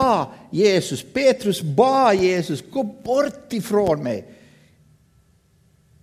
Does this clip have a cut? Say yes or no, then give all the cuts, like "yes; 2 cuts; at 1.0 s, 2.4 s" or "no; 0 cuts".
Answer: no; 0 cuts